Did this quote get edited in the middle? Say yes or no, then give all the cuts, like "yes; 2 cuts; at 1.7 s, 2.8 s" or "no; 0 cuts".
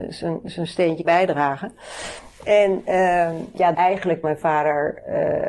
yes; 3 cuts; at 1.0 s, 3.7 s, 4.2 s